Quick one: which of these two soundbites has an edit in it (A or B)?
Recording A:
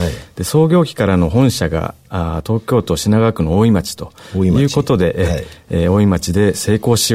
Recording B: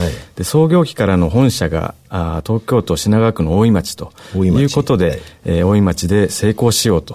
B